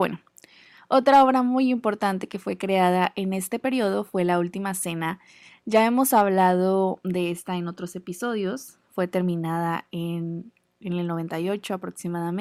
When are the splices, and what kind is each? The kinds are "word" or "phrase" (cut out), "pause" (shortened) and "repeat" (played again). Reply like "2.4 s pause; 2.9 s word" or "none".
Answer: none